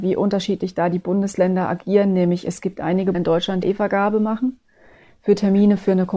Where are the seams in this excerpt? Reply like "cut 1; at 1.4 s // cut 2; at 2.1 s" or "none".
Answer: cut 1; at 3.1 s // cut 2; at 3.6 s